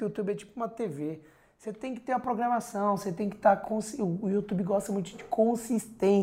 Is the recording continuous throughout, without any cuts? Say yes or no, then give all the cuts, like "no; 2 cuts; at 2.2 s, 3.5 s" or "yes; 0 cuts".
yes; 0 cuts